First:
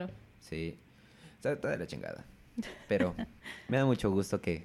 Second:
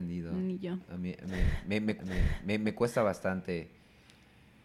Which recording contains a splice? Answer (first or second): second